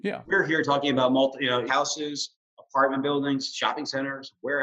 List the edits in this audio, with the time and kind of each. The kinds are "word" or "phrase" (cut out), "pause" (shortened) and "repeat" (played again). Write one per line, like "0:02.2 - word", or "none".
0:01.7 - phrase